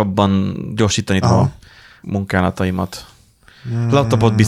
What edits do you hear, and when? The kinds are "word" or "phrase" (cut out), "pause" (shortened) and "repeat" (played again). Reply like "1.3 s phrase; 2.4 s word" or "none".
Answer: 1.2 s word; 2.0 s phrase